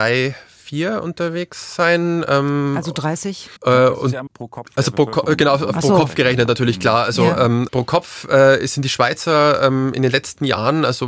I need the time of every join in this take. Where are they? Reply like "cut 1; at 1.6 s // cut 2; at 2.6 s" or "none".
cut 1; at 3.6 s // cut 2; at 4.3 s // cut 3; at 7.7 s